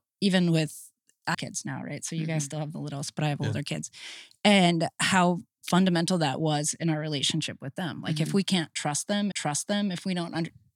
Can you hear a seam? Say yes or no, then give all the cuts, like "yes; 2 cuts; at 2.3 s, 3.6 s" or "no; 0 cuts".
yes; 2 cuts; at 1.3 s, 9.3 s